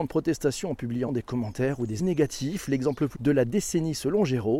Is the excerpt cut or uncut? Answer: cut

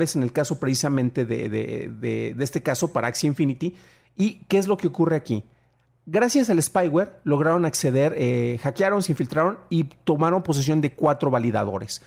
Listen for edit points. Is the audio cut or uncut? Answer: uncut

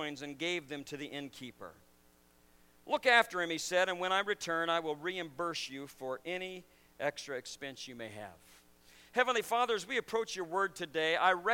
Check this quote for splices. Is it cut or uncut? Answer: uncut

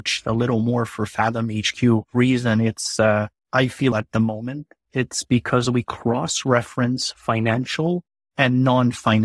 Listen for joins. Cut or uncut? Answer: cut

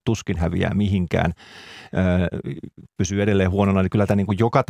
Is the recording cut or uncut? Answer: cut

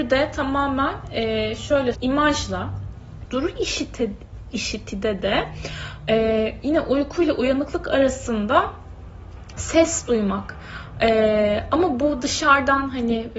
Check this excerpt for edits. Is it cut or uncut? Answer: cut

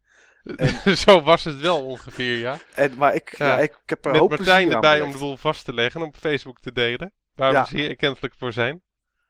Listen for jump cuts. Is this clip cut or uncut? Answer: cut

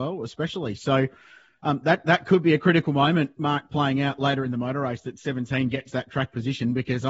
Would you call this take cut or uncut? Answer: uncut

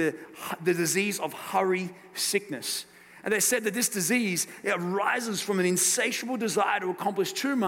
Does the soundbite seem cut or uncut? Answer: uncut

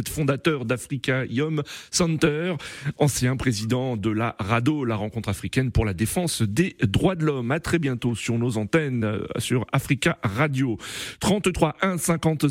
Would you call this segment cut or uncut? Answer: uncut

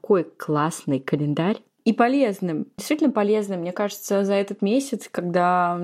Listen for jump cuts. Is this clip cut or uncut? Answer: uncut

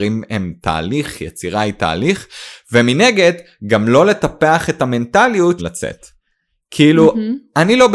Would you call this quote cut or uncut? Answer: cut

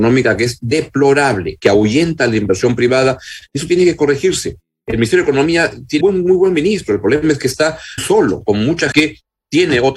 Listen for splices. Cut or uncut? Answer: cut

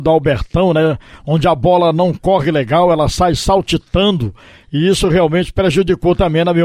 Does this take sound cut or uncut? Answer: uncut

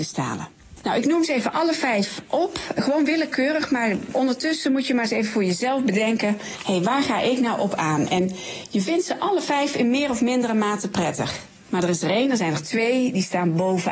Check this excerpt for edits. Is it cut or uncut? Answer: uncut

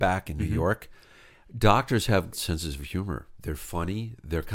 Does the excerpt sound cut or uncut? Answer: cut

